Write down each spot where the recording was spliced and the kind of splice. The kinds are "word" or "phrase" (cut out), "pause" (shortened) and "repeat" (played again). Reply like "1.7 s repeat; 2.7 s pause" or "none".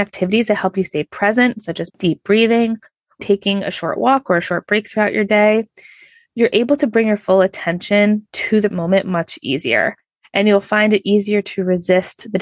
1.9 s word; 3.2 s word; 8.7 s word